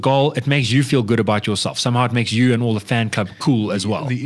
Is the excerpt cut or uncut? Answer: uncut